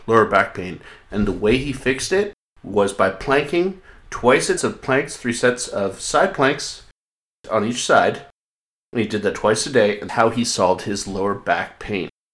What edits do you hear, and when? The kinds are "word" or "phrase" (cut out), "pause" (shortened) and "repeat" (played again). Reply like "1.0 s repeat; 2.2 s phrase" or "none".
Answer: 4.6 s phrase; 10.1 s word

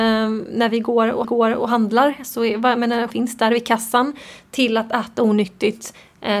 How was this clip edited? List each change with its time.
1.2 s repeat; 3.1 s word

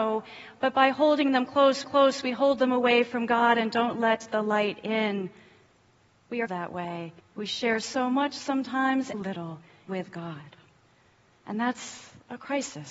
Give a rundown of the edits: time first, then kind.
1.8 s repeat; 6.5 s phrase; 7.2 s pause; 9.1 s phrase; 9.9 s word

